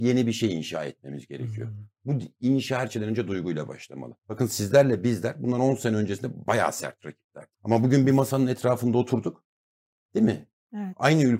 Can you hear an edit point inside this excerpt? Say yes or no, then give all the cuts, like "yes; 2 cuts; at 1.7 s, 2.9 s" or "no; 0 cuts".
yes; 2 cuts; at 4.2 s, 7.5 s